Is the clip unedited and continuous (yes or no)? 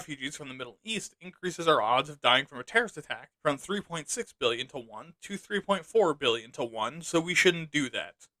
no